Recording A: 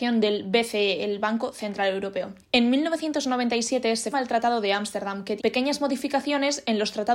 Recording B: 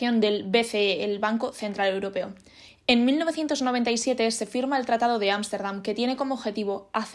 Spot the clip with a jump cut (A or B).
A